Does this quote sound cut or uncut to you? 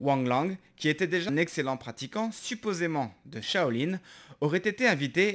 cut